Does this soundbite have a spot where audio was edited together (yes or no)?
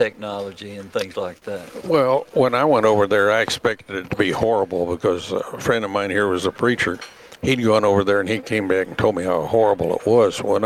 no